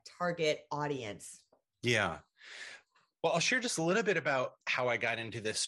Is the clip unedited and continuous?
yes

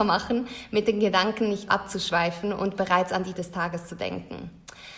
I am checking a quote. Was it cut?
yes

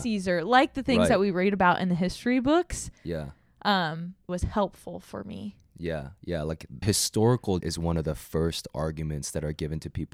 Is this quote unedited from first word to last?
no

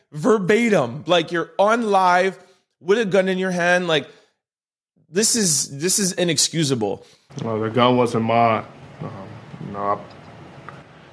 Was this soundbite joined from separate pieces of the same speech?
no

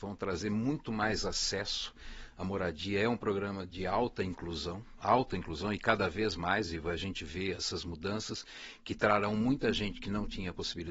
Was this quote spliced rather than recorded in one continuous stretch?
no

